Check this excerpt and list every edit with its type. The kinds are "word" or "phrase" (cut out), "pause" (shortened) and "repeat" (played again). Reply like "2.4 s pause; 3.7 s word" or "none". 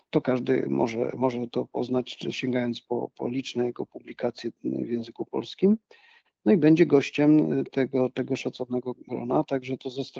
none